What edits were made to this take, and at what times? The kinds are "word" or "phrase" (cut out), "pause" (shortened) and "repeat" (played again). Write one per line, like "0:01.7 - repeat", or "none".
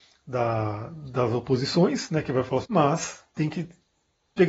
0:02.6 - phrase
0:03.3 - pause